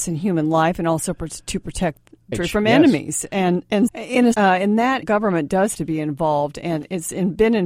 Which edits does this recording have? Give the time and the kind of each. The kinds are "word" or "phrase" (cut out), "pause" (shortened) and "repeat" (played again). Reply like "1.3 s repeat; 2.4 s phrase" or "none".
2.3 s word; 3.9 s word; 4.3 s word; 5.0 s word; 5.7 s word